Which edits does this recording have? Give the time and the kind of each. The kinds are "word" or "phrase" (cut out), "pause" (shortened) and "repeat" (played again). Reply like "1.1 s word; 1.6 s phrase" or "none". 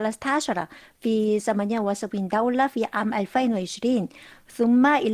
none